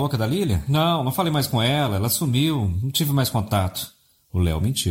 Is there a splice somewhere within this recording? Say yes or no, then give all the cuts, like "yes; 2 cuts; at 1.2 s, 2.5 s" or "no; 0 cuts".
no; 0 cuts